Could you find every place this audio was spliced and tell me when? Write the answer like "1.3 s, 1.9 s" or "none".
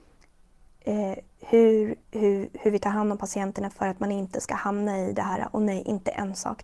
2.0 s